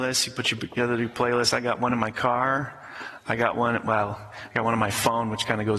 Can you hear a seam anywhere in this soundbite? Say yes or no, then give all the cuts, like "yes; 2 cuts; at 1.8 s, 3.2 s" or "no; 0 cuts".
no; 0 cuts